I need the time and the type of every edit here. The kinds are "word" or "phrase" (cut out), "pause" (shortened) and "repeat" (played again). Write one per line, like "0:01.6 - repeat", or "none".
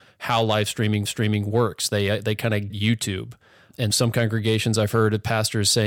0:01.0 - repeat
0:02.7 - word
0:03.9 - word